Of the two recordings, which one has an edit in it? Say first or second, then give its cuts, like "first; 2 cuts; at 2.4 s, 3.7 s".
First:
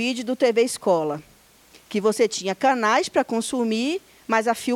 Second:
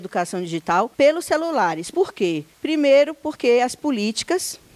second; 2 cuts; at 0.9 s, 2.5 s